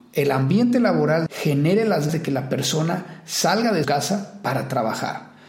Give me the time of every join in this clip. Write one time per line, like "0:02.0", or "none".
0:01.3
0:02.1
0:03.8